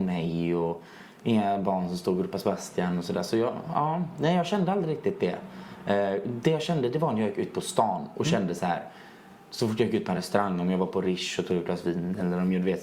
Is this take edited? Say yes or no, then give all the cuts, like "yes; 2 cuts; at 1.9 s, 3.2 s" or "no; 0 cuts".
no; 0 cuts